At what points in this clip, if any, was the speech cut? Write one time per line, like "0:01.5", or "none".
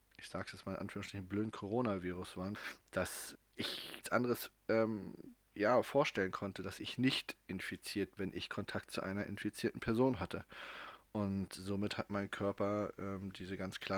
0:03.3
0:04.0
0:08.2